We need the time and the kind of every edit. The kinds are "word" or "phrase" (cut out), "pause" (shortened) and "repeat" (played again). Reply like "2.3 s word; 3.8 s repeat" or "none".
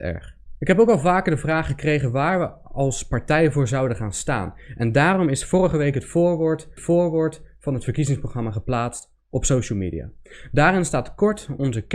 6.8 s repeat